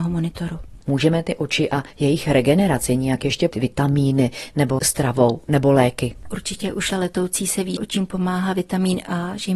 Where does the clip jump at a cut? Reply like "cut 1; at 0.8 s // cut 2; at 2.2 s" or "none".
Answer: cut 1; at 3.5 s // cut 2; at 4.8 s // cut 3; at 6.9 s // cut 4; at 7.8 s